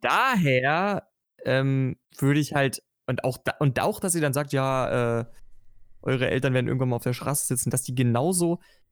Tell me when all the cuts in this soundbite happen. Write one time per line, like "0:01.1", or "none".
0:02.0